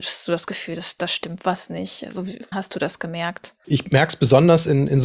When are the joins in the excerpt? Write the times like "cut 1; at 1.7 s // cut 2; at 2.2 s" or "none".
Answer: cut 1; at 2.5 s